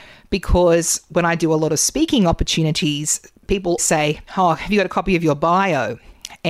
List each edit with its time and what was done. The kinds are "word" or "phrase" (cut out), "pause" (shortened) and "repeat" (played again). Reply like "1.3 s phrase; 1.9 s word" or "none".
3.8 s word; 4.3 s pause

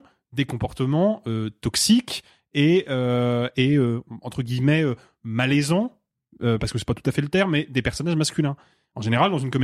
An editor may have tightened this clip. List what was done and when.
none

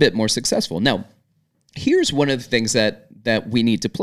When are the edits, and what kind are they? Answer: none

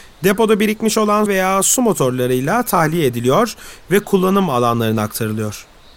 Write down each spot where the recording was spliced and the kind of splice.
1.3 s phrase

